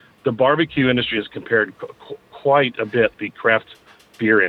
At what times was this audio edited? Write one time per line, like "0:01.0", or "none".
0:03.1